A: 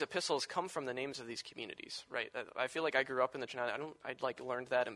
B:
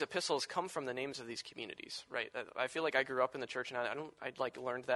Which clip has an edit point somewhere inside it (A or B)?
A